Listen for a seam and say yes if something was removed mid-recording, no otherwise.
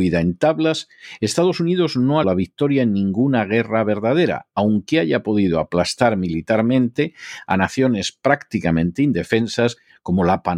yes